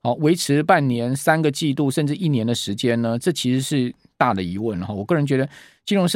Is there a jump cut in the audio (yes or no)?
no